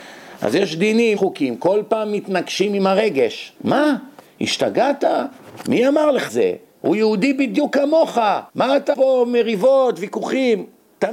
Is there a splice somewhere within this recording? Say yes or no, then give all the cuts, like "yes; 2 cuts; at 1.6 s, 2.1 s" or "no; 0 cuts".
yes; 5 cuts; at 1.2 s, 3.6 s, 6.3 s, 8.5 s, 8.9 s